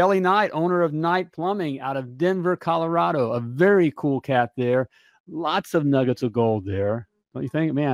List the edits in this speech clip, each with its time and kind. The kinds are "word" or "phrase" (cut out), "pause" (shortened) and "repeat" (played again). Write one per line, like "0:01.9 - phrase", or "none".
none